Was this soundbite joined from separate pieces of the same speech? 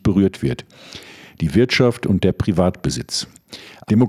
no; 0 cuts

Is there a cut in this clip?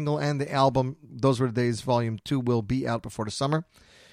no; 0 cuts

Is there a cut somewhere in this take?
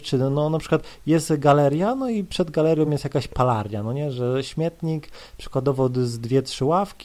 no; 0 cuts

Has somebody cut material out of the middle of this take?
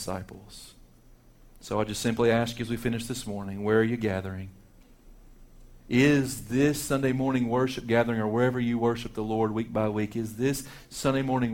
no; 0 cuts

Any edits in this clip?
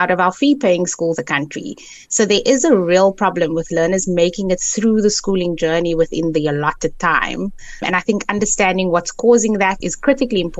yes; 1 cut; at 1.2 s

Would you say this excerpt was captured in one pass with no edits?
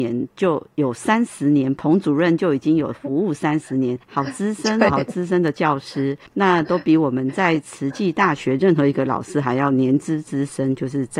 no; 3 cuts; at 4.0 s, 4.9 s, 6.3 s

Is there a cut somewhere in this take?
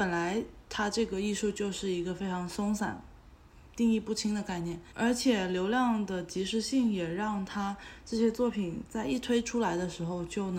yes; 1 cut; at 4.9 s

